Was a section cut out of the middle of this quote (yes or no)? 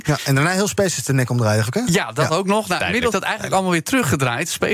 yes